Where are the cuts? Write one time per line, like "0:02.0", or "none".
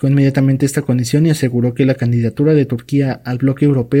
none

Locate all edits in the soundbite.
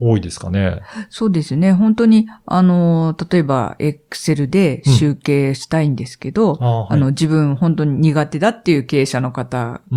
none

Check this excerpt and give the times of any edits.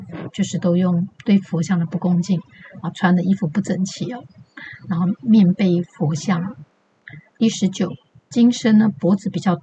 none

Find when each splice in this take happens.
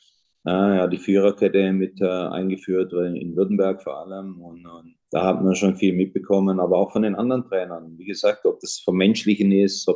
0:05.0

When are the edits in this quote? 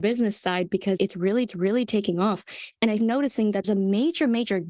0:01.0
0:01.5
0:03.0
0:03.6

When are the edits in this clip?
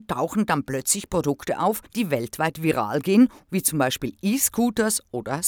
0:01.9

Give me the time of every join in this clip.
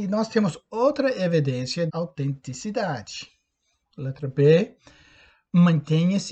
0:01.9

